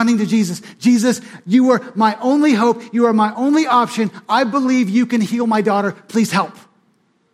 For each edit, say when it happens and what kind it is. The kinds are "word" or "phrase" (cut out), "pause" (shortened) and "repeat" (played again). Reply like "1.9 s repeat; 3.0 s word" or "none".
none